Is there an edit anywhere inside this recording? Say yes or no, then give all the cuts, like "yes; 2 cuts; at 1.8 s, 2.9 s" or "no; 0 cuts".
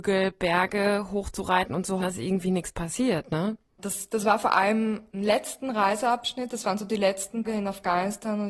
yes; 2 cuts; at 2.0 s, 7.4 s